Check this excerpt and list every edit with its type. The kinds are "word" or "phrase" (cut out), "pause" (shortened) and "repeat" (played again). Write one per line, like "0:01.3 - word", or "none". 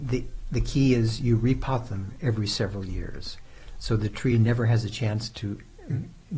none